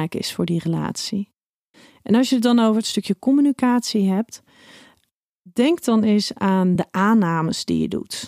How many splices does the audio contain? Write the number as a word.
zero